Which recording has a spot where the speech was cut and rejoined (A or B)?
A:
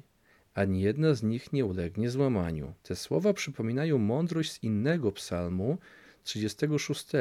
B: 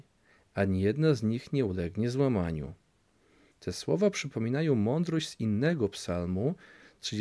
A